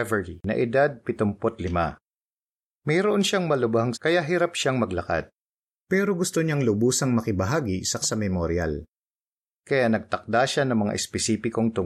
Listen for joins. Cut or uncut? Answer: cut